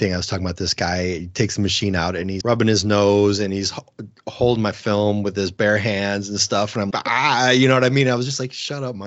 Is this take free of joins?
no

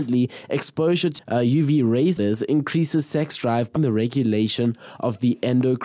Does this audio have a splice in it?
yes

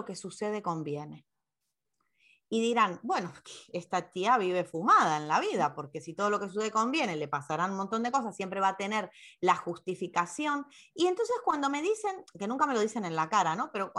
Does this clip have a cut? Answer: no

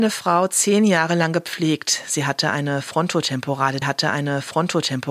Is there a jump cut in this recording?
yes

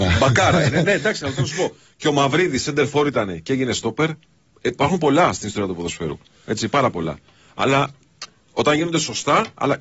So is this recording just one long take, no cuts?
yes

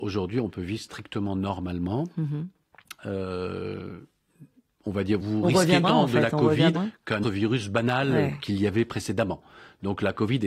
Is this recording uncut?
no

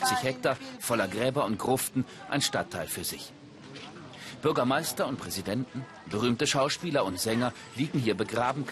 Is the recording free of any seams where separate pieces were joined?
yes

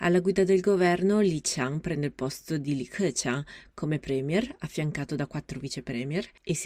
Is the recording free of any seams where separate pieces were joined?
yes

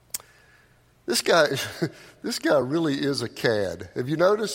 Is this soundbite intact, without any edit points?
yes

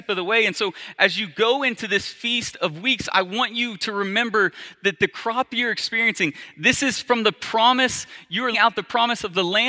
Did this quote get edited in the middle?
yes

